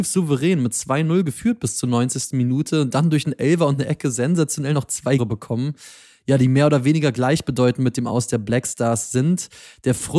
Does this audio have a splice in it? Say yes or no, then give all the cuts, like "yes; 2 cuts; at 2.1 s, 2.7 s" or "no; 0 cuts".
yes; 1 cut; at 5.2 s